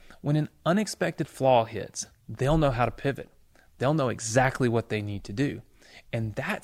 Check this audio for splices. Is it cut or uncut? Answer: uncut